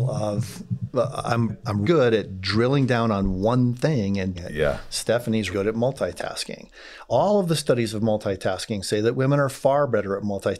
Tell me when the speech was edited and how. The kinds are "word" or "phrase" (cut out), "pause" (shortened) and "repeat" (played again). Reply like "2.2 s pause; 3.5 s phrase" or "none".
1.5 s word; 1.8 s word; 4.3 s word; 5.5 s word